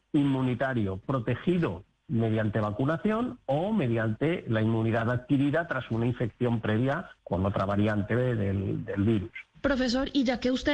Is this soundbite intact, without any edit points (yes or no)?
no